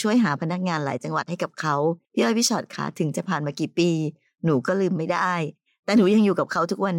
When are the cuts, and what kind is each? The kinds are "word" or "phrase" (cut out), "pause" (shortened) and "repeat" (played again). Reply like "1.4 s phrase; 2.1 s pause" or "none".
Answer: 2.0 s pause